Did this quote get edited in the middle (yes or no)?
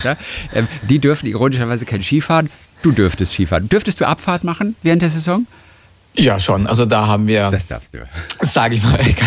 no